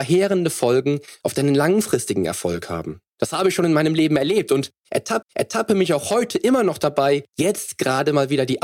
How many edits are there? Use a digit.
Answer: 3